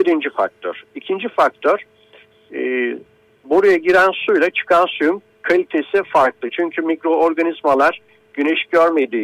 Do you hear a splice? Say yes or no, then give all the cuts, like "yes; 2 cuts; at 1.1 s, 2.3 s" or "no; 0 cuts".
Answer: no; 0 cuts